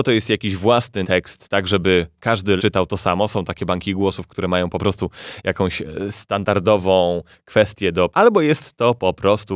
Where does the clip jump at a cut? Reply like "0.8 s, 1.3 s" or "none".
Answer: 1.0 s, 2.6 s, 8.1 s

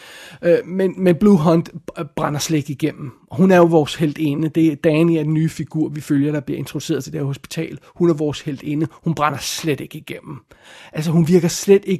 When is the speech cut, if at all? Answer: none

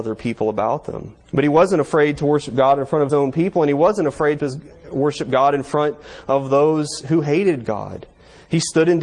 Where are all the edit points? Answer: 1.2 s, 3.1 s, 4.4 s

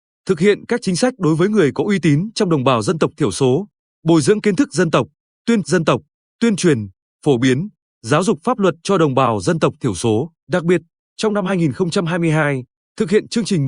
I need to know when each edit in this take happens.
5.6 s, 10.4 s

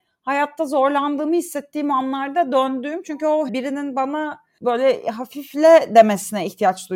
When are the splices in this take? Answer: 3.5 s

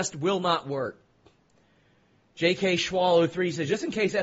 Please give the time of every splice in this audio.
none

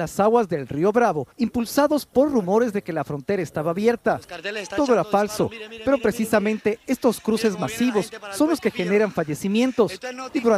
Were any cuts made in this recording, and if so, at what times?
1.3 s

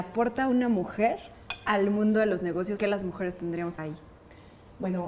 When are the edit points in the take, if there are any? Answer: 2.8 s, 3.8 s

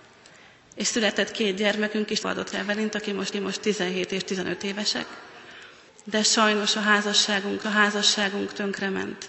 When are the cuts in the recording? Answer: 2.2 s, 2.5 s, 3.3 s, 5.9 s, 7.6 s

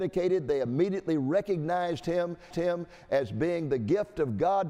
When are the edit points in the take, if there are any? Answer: 2.5 s

